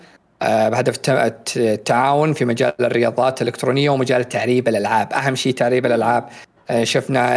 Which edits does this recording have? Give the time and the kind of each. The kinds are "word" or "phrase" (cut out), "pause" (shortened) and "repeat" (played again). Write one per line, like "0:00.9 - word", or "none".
none